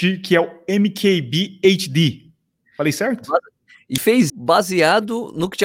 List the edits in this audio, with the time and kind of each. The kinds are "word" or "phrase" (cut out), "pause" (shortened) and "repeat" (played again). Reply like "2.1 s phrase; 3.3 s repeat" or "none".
4.0 s word; 4.3 s word